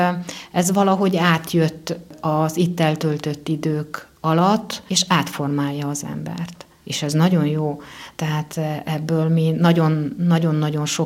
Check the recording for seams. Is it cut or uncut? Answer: uncut